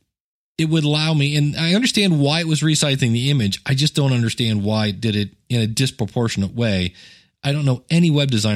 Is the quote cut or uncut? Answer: uncut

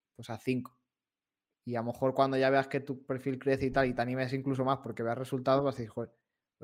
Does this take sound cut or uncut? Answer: uncut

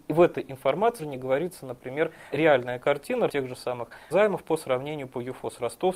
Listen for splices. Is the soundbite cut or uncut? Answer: cut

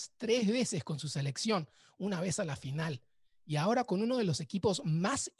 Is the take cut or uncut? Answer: uncut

